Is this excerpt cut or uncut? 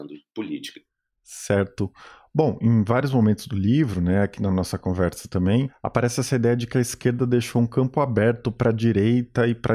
uncut